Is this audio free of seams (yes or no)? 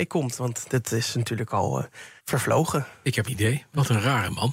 no